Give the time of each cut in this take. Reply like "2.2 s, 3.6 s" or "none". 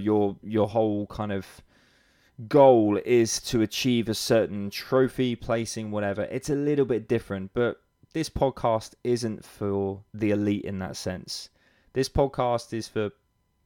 10.1 s